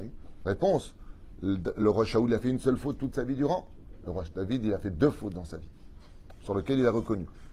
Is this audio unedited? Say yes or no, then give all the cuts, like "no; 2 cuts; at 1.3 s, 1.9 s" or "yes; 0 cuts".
yes; 0 cuts